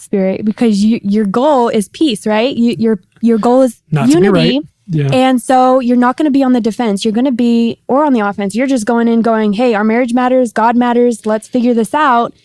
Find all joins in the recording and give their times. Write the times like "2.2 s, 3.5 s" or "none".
4.7 s

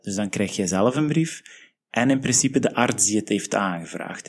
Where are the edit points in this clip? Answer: none

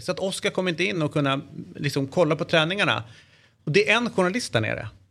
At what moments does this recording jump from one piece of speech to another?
none

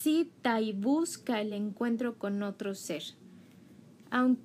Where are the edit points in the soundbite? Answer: none

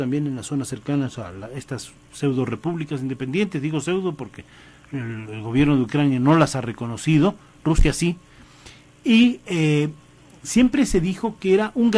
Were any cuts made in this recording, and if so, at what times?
none

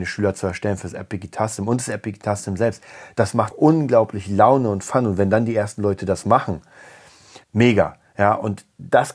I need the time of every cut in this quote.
3.5 s, 7.4 s

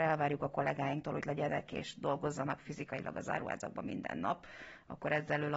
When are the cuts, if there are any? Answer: 1.2 s

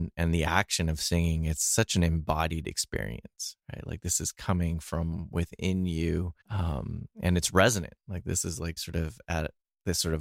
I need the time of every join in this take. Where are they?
6.4 s, 8.8 s

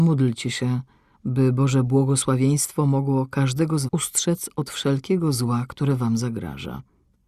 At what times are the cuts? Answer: 3.9 s

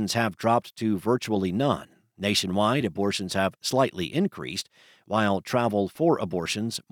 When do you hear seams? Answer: none

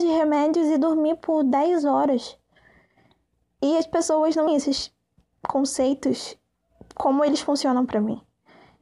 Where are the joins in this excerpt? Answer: 4.5 s

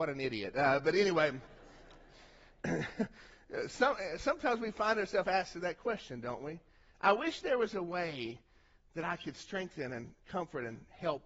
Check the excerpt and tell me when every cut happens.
none

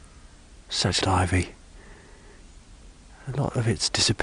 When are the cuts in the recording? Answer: 1.0 s

